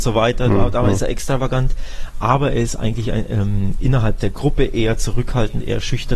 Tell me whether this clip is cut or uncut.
uncut